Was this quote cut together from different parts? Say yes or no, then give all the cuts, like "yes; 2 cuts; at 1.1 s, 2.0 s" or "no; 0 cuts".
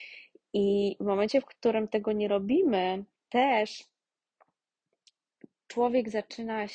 yes; 1 cut; at 3.2 s